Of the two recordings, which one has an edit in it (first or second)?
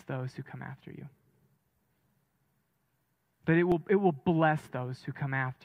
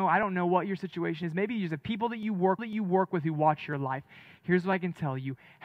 second